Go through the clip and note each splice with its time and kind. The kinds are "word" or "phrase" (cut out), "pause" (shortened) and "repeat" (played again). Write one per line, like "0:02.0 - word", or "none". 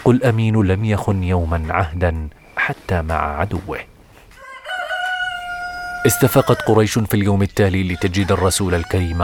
none

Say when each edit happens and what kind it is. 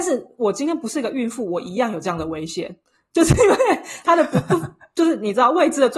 none

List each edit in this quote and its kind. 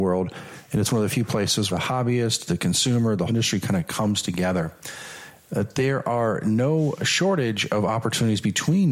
0:01.7 - word
0:03.3 - phrase

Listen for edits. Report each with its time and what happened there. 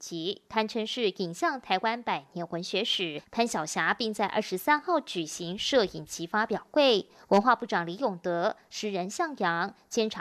none

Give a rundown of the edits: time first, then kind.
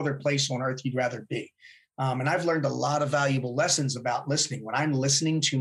none

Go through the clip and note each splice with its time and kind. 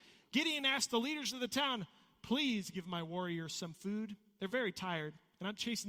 none

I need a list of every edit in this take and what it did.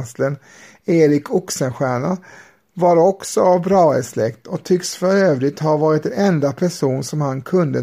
none

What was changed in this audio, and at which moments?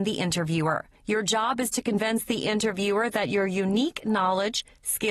0:00.9 - pause

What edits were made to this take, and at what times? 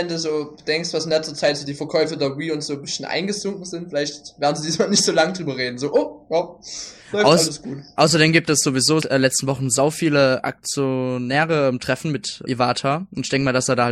0:01.6 - phrase
0:09.0 - word
0:12.5 - word

